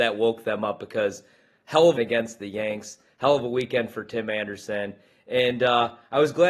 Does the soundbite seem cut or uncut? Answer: cut